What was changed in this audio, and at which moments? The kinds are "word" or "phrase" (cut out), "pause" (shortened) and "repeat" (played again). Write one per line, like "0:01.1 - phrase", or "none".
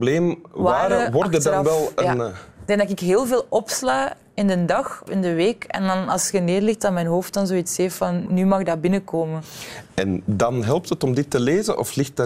0:05.1 - word
0:08.3 - word
0:09.9 - pause